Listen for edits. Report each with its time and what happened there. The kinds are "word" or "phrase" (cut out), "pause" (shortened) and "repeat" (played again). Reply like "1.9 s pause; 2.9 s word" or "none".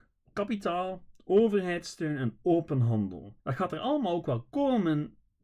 3.4 s pause